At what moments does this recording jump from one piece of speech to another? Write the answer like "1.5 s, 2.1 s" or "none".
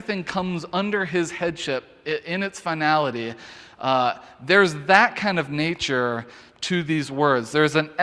none